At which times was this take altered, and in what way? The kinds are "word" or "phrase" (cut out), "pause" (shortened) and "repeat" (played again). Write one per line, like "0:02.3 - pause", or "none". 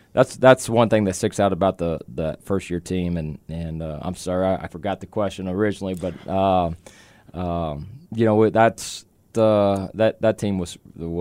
0:04.7 - phrase
0:08.0 - pause
0:09.3 - word